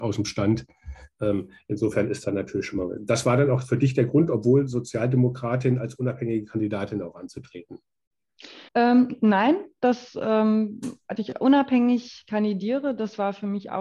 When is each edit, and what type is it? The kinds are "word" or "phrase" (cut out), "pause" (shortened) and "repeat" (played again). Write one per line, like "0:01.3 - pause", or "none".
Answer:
0:02.2 - word
0:08.7 - pause
0:11.2 - word